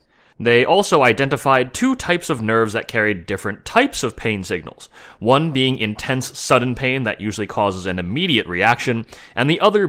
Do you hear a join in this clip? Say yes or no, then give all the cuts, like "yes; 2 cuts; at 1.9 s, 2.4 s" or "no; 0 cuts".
no; 0 cuts